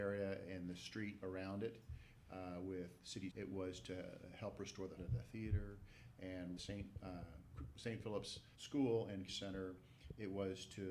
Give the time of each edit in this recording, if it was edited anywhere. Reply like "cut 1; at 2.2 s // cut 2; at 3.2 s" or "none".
cut 1; at 3.3 s // cut 2; at 5.0 s // cut 3; at 6.6 s // cut 4; at 8.5 s // cut 5; at 9.3 s